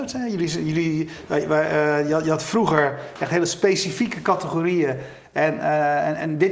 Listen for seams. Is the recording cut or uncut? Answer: uncut